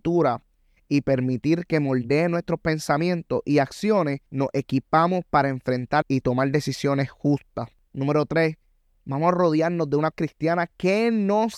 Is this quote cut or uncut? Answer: cut